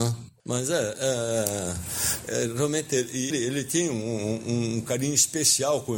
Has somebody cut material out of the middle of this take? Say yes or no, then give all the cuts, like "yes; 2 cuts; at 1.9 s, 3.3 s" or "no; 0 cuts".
yes; 1 cut; at 3.3 s